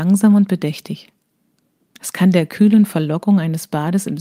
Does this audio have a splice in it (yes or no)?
no